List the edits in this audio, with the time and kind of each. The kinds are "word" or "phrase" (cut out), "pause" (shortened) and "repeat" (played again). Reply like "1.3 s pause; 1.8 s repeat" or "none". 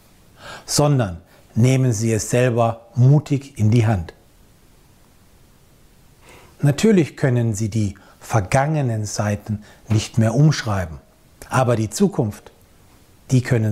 none